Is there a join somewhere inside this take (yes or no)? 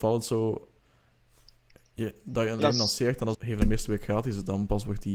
yes